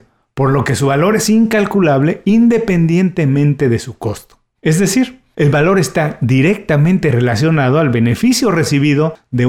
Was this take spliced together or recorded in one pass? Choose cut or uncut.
uncut